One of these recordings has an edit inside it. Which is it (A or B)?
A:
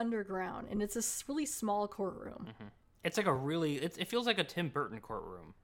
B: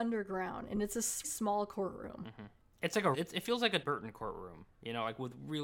B